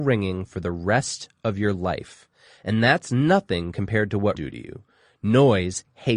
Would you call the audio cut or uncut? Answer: cut